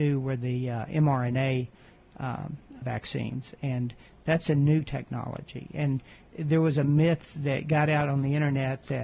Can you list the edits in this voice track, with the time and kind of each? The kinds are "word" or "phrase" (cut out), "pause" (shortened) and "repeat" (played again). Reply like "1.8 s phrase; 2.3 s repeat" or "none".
2.8 s word; 7.3 s word